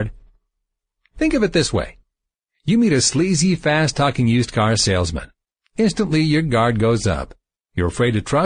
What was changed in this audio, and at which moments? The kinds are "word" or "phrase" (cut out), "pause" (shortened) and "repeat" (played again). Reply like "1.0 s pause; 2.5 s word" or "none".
none